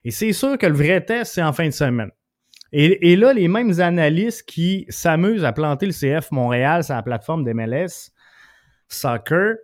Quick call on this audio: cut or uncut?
uncut